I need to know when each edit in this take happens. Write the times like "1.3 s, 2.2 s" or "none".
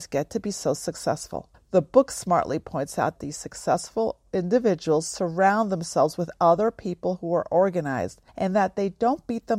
1.5 s, 3.2 s, 8.3 s